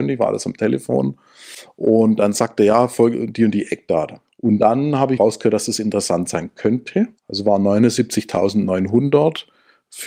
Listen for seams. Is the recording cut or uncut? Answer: cut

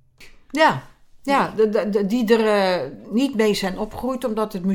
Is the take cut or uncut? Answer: uncut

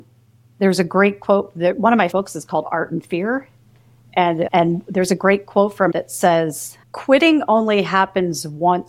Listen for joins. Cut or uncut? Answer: cut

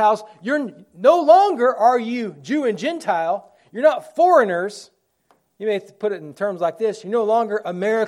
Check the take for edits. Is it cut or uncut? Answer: uncut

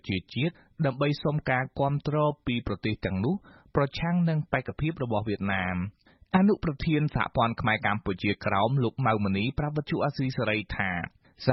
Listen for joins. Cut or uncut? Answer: uncut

